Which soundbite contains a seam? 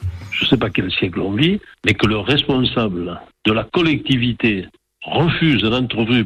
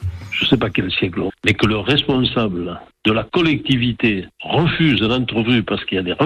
second; 2 cuts; at 1.3 s, 4.3 s

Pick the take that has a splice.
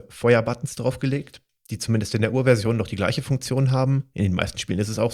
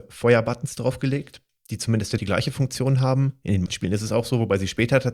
second; 2 cuts; at 2.2 s, 3.7 s

